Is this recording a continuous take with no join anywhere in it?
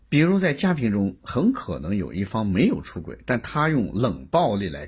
yes; 0 cuts

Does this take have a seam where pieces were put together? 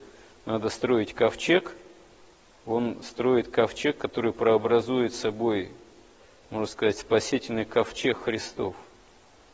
no; 0 cuts

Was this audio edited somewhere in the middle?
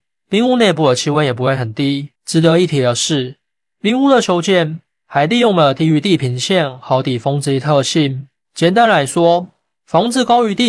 yes; 1 cut; at 2.2 s

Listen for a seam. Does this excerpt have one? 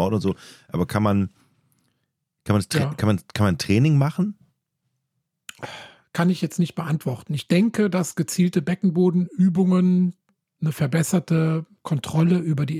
no; 0 cuts

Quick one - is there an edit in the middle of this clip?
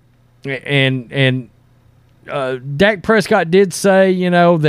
no; 0 cuts

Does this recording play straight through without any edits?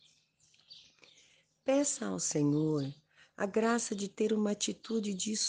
yes; 0 cuts

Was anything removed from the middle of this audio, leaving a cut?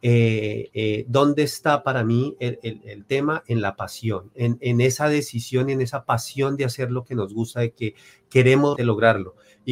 yes; 1 cut; at 8.8 s

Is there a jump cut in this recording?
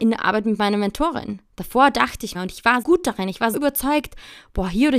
yes; 4 cuts; at 1.5 s, 2.3 s, 2.8 s, 3.5 s

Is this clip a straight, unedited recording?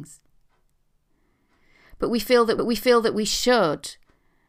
no; 1 cut; at 2.6 s

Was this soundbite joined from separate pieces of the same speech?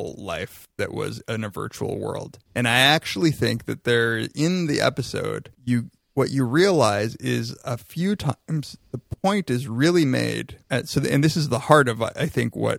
yes; 3 cuts; at 2.5 s, 5.5 s, 10.6 s

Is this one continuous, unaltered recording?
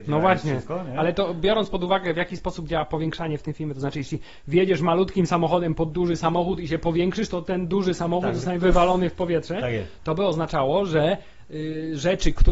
yes; 0 cuts

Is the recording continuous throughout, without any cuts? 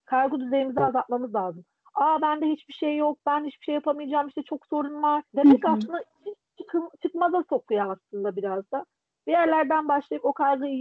yes; 0 cuts

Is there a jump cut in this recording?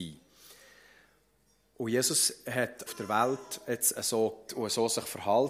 yes; 2 cuts; at 2.9 s, 4.5 s

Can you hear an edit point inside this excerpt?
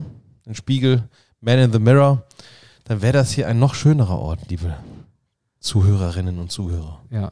no; 0 cuts

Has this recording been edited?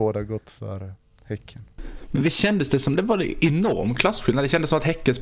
no; 0 cuts

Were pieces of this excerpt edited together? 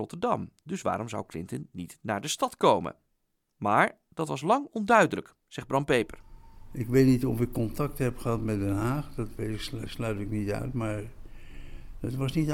no; 0 cuts

